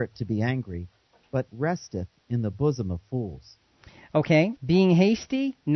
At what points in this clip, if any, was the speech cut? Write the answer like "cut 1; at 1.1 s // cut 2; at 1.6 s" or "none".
cut 1; at 1.5 s // cut 2; at 4.6 s